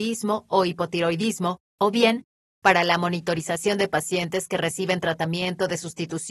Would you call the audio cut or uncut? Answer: uncut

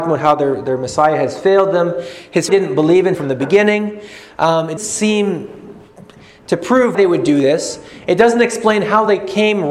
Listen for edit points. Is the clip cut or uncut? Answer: cut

